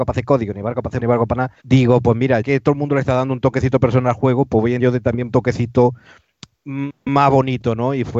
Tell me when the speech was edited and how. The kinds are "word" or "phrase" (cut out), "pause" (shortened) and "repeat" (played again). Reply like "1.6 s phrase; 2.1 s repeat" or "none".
1.0 s word; 1.6 s pause; 2.4 s word; 4.8 s word; 5.3 s phrase